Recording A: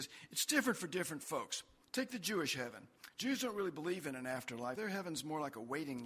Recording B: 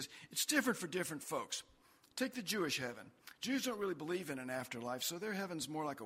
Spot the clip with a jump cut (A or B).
A